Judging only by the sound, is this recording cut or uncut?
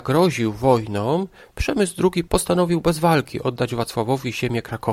uncut